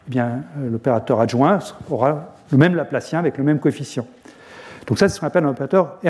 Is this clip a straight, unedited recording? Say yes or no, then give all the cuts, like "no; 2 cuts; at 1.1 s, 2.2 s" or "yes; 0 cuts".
yes; 0 cuts